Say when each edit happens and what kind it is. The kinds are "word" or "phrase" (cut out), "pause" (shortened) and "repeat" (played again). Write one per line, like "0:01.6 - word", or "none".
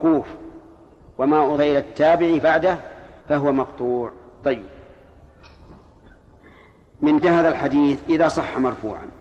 0:01.6 - word
0:02.4 - word
0:03.2 - pause
0:07.2 - word